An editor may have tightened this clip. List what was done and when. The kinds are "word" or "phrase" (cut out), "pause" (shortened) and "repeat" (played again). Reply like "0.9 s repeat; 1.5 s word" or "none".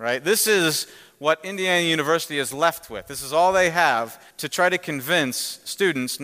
4.3 s pause